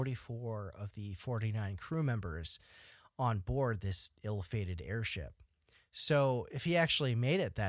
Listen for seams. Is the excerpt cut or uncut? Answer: uncut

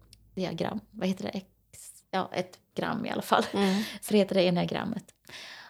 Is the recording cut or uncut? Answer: cut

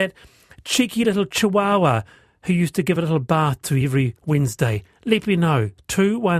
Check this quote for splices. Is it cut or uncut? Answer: uncut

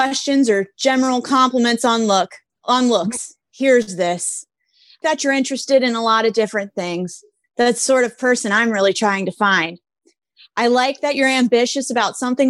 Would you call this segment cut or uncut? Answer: cut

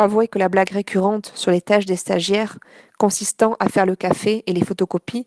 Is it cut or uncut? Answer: uncut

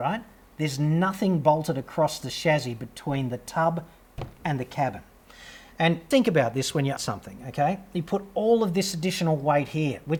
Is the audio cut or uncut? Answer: cut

